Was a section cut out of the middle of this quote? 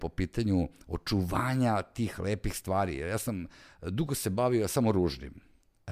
no; 0 cuts

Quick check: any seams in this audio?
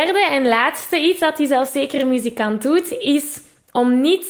no; 0 cuts

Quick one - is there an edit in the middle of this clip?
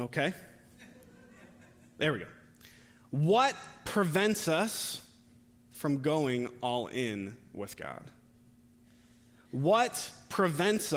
no; 0 cuts

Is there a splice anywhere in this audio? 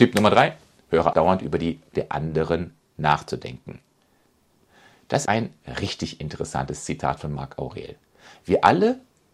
yes; 3 cuts; at 1.1 s, 1.9 s, 5.3 s

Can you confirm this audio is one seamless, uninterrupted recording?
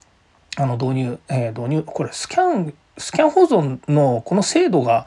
no; 1 cut; at 3.8 s

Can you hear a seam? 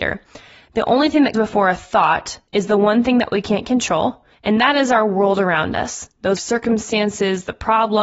yes; 4 cuts; at 1.3 s, 2.5 s, 4.3 s, 6.4 s

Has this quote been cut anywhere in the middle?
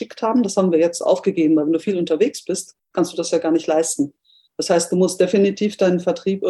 no; 0 cuts

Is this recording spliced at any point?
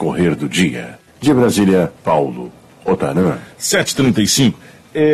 yes; 1 cut; at 2.0 s

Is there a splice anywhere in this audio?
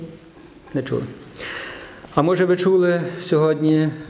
no; 0 cuts

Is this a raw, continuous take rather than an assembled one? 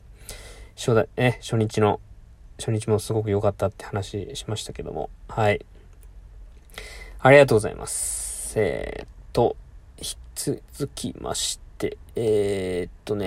yes; 0 cuts

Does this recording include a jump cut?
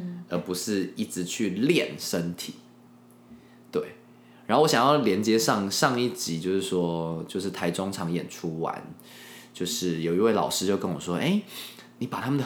no; 0 cuts

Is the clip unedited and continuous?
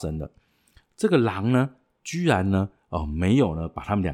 yes; 0 cuts

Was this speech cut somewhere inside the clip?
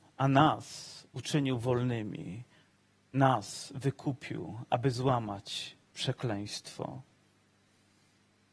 no; 0 cuts

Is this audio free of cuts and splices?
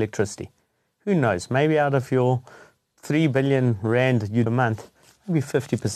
no; 1 cut; at 4.5 s

